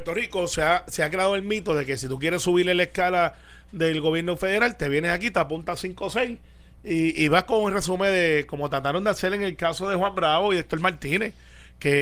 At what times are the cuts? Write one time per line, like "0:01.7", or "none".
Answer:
none